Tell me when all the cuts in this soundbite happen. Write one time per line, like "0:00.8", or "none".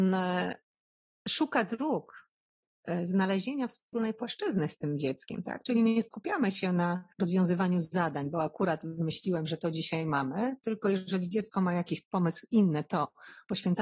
0:07.1